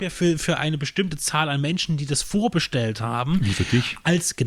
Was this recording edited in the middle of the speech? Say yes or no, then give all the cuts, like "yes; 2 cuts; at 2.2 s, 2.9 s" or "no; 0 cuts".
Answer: no; 0 cuts